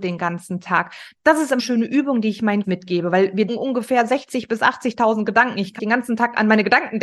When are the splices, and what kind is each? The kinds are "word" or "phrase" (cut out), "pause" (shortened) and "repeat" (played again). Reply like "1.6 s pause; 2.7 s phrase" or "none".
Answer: 1.6 s word; 2.6 s word; 3.5 s word; 5.8 s word